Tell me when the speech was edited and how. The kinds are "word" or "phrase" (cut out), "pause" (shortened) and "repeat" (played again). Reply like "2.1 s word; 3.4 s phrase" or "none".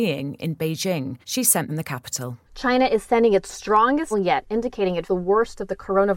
1.2 s pause; 1.7 s phrase; 2.4 s pause; 4.1 s word; 5.1 s word